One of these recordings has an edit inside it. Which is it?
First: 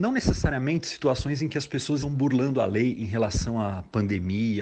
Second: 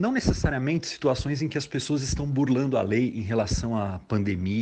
first; 1 cut; at 2.0 s

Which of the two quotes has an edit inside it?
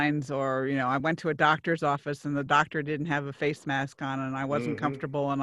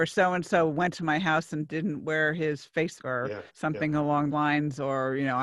second; 3 cuts; at 3.0 s, 3.5 s, 4.3 s

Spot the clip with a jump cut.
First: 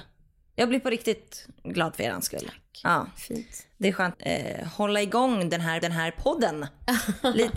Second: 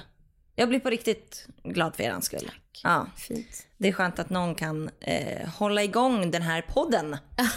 first; 2 cuts; at 4.1 s, 5.8 s

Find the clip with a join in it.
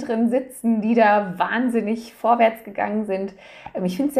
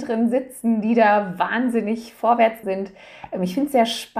second; 1 cut; at 2.6 s

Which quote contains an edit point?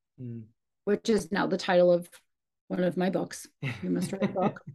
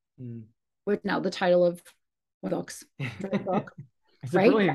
second; 3 cuts; at 1.0 s, 2.5 s, 3.2 s

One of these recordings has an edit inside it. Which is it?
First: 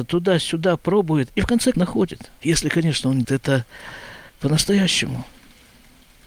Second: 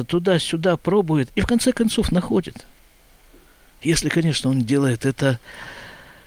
first; 4 cuts; at 1.7 s, 2.4 s, 3.2 s, 4.3 s

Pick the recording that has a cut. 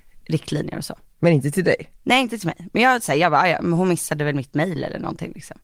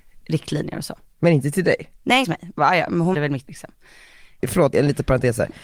second; 5 cuts; at 2.2 s, 2.6 s, 3.1 s, 3.5 s, 4.7 s

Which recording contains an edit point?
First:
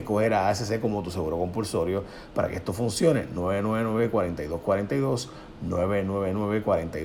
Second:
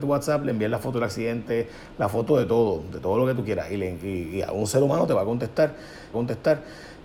second; 1 cut; at 6.1 s

